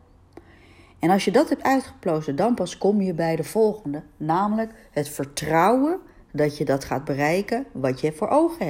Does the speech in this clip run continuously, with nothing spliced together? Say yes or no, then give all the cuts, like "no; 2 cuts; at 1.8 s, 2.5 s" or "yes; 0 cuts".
yes; 0 cuts